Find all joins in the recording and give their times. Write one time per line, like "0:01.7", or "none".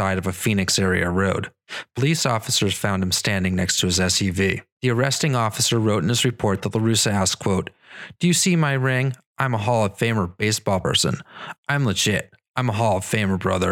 0:04.7